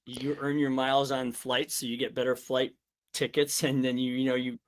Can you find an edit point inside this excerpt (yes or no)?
no